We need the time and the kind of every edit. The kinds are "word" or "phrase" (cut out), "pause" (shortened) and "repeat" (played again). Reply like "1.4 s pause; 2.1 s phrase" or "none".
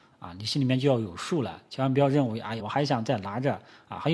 2.6 s phrase